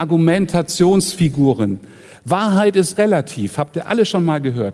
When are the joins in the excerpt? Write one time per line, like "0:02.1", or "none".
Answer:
0:03.0